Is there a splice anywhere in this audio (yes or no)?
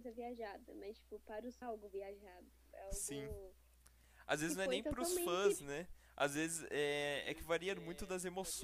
yes